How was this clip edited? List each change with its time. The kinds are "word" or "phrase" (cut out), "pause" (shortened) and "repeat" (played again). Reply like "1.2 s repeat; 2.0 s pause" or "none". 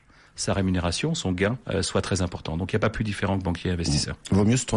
1.6 s pause